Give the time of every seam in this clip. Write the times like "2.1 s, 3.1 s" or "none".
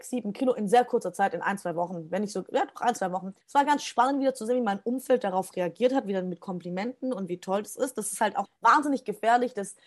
3.4 s, 8.5 s